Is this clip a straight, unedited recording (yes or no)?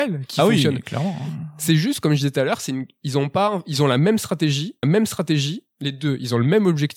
no